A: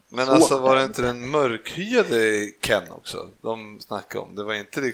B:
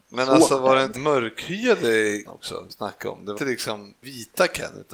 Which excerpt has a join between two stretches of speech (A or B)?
B